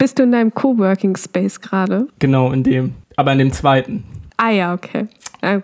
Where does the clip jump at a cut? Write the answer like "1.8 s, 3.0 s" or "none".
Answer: 2.1 s, 3.0 s, 4.3 s